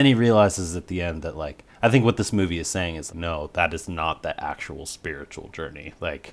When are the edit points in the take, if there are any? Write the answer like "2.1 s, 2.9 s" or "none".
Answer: 3.1 s